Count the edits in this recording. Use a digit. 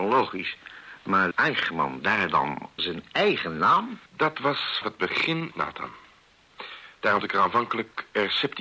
6